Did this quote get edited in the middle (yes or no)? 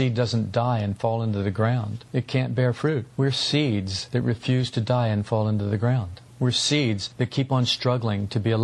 no